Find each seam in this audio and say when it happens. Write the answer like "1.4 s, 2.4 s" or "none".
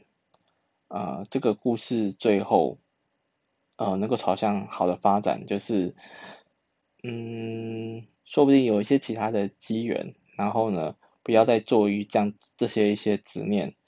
8.2 s